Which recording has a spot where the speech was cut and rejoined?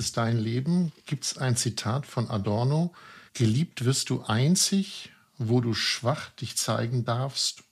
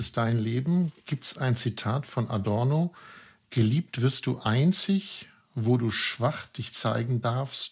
first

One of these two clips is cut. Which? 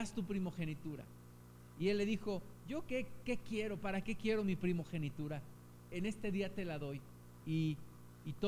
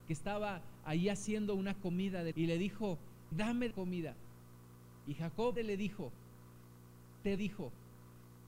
second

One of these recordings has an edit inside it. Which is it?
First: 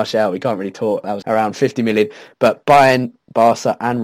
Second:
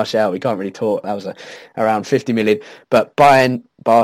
first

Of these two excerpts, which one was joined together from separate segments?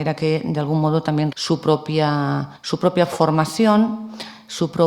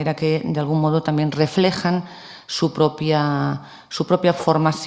first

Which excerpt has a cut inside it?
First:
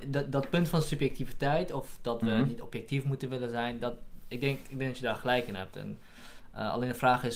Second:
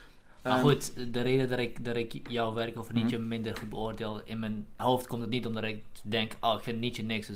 second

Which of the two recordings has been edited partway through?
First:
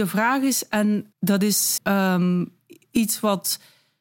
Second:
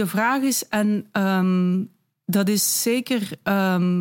first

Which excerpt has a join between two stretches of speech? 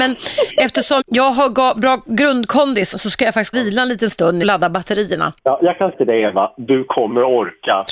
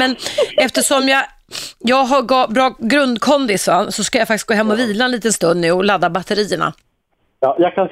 first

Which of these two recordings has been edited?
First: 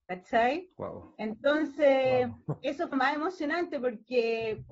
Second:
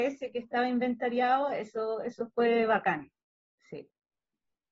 first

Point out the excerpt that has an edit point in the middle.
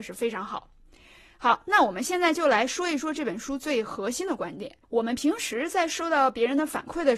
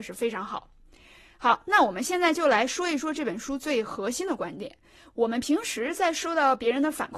first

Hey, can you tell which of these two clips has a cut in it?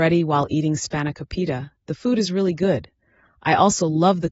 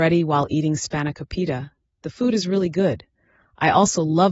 first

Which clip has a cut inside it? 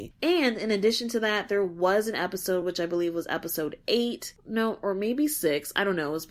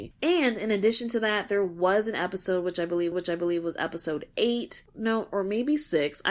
second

